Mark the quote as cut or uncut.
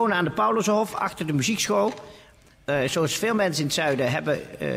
uncut